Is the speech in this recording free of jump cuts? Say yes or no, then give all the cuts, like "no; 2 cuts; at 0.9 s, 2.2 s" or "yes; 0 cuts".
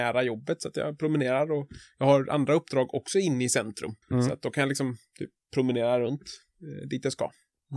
no; 1 cut; at 4.0 s